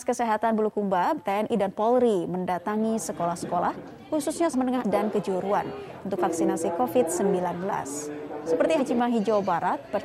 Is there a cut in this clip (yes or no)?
yes